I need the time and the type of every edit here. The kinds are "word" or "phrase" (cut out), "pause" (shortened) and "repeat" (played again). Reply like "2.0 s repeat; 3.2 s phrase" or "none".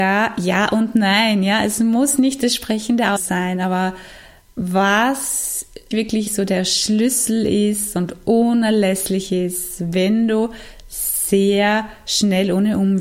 3.2 s word; 5.9 s word; 6.3 s word